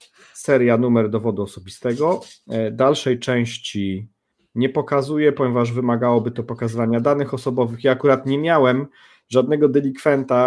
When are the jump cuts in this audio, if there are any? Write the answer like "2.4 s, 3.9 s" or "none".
none